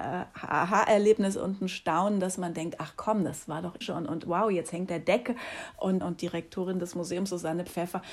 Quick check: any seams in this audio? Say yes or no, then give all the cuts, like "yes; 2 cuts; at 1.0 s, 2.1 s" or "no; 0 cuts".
yes; 3 cuts; at 3.8 s, 4.9 s, 6.0 s